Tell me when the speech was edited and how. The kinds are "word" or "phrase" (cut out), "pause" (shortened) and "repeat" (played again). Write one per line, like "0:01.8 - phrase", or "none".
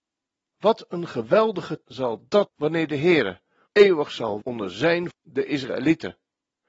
0:01.8 - word
0:02.5 - word
0:03.7 - word
0:04.4 - word
0:05.1 - word